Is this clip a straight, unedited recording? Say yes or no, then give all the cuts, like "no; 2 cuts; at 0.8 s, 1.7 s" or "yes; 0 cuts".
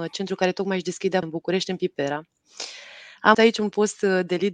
no; 2 cuts; at 1.2 s, 3.3 s